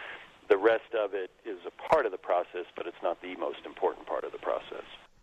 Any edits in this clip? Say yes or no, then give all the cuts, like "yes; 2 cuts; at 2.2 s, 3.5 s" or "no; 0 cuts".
no; 0 cuts